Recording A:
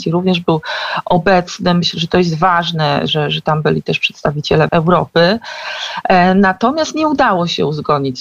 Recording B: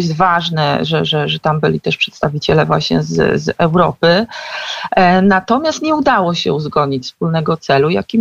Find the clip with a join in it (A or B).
A